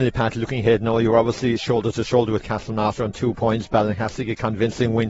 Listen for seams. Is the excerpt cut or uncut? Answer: uncut